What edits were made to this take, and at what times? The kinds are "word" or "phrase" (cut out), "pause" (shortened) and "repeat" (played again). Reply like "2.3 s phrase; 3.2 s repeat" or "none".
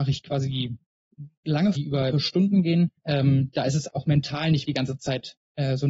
1.7 s word; 2.1 s word; 3.0 s pause; 3.9 s word; 4.6 s word